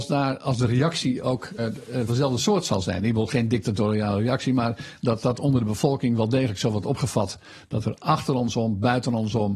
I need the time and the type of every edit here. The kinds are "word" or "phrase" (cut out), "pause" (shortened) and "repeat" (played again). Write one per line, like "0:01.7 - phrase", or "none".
0:01.6 - word
0:02.1 - word
0:05.2 - word